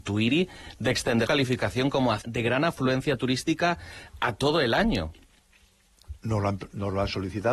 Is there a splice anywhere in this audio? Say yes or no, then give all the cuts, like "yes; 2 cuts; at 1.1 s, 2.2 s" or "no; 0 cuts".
yes; 3 cuts; at 1.3 s, 2.2 s, 6.2 s